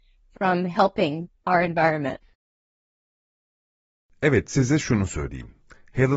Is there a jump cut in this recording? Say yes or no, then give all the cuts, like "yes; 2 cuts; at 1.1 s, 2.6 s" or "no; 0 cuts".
no; 0 cuts